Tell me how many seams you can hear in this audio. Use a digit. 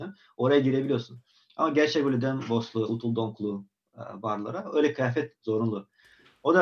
0